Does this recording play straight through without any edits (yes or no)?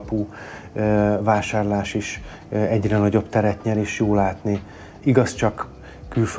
yes